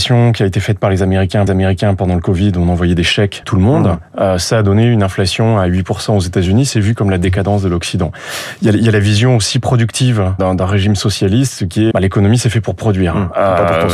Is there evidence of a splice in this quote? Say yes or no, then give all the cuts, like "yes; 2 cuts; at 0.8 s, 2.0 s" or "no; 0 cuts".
yes; 4 cuts; at 1.5 s, 3.4 s, 10.4 s, 11.9 s